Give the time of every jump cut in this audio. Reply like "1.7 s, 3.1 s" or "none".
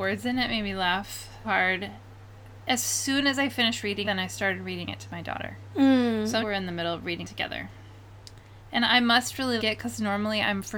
1.4 s, 4.0 s, 6.4 s, 7.2 s, 9.6 s